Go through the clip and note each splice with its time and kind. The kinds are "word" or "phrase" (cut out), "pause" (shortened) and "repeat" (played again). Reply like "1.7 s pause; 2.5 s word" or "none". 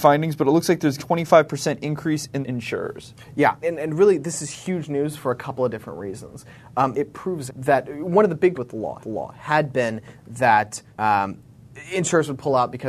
1.0 s phrase; 2.4 s phrase; 3.6 s word; 6.9 s phrase; 7.5 s word; 8.5 s word; 9.0 s repeat; 10.9 s pause